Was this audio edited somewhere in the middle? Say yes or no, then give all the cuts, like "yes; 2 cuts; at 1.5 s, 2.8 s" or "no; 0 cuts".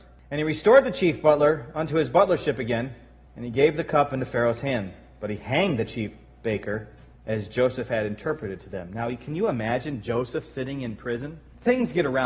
no; 0 cuts